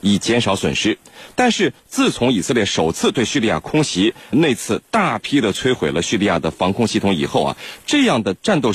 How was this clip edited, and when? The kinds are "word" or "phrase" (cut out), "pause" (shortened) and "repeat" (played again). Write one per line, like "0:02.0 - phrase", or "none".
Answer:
0:04.3 - word